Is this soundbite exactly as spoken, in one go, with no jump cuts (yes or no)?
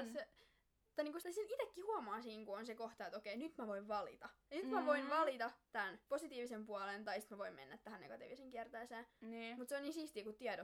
no